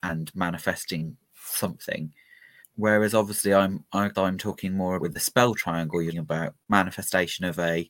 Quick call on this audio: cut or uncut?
cut